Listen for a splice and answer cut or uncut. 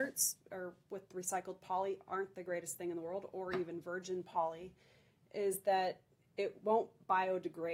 uncut